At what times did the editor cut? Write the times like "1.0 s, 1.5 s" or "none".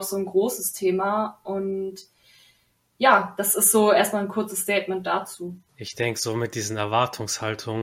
none